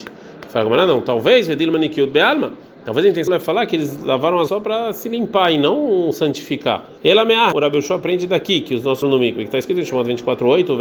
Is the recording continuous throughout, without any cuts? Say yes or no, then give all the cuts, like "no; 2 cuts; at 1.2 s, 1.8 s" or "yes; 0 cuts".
no; 5 cuts; at 3.3 s, 4.5 s, 7.0 s, 7.5 s, 9.0 s